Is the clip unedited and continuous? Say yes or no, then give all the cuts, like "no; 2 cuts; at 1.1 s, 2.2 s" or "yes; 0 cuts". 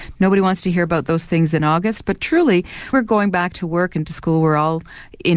no; 2 cuts; at 2.9 s, 4.0 s